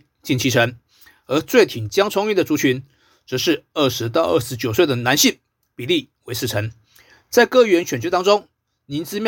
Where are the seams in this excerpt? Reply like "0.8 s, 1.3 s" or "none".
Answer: none

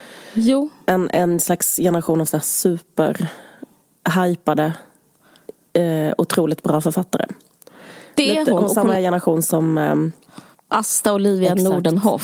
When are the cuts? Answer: none

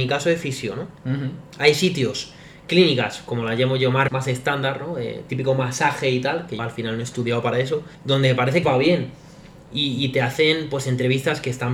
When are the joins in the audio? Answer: 1.0 s, 4.1 s, 6.6 s, 7.9 s, 8.6 s

